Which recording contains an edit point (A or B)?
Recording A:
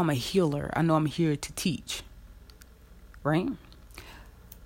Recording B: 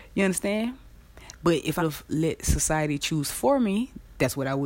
B